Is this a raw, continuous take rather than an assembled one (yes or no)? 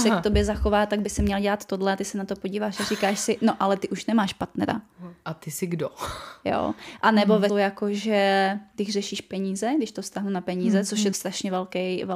no